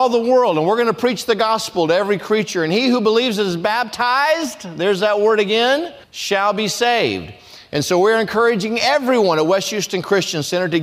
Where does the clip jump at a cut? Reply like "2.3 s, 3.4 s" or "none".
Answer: 6.0 s